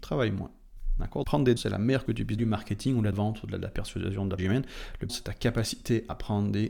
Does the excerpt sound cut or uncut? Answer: cut